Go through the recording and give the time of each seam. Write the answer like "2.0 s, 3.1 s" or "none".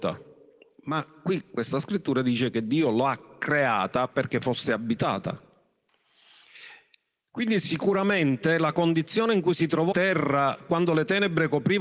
9.9 s